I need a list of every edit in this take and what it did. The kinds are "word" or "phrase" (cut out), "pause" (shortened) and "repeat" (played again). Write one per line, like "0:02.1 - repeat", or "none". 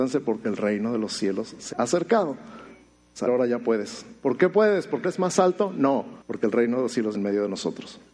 0:01.7 - word
0:03.3 - phrase
0:05.0 - word
0:06.2 - pause
0:07.1 - word